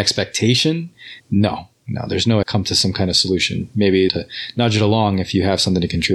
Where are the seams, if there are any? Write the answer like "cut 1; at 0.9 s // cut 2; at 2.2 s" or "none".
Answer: cut 1; at 1.2 s // cut 2; at 2.4 s // cut 3; at 4.1 s